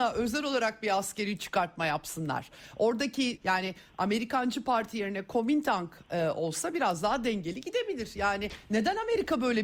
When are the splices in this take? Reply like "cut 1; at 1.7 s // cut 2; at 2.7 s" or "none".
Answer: cut 1; at 3.4 s